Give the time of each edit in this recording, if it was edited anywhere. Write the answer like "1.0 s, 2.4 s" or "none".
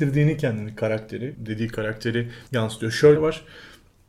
1.3 s, 2.5 s, 3.2 s